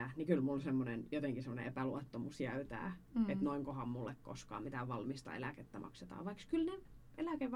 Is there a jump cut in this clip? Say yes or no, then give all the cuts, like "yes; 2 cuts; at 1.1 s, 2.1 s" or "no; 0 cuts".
no; 0 cuts